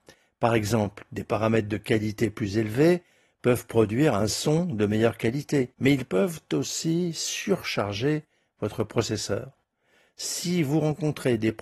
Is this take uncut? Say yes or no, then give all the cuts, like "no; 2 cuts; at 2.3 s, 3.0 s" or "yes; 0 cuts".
no; 1 cut; at 5.7 s